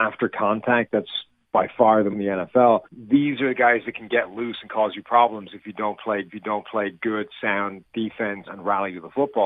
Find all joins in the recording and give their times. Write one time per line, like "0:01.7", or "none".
0:02.1
0:02.8
0:06.3
0:08.5